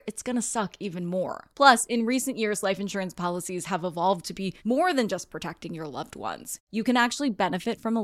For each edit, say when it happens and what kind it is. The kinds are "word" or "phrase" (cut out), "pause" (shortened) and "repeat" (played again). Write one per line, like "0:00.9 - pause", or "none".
0:01.5 - pause
0:04.6 - pause